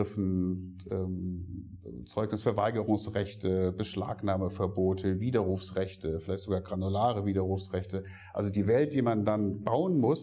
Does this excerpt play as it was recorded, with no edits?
yes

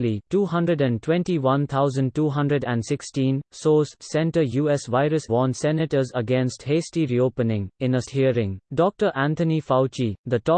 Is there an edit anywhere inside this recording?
yes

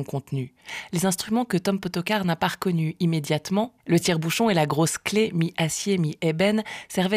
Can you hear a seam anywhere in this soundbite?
no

